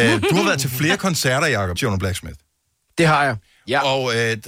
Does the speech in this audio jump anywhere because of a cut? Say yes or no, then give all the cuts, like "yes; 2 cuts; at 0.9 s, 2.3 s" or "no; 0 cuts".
yes; 1 cut; at 1.8 s